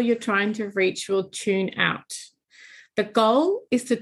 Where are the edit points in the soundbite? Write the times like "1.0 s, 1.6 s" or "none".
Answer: none